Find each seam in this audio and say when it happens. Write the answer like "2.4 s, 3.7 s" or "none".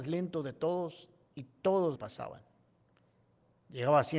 2.0 s